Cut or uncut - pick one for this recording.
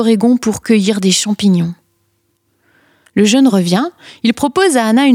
uncut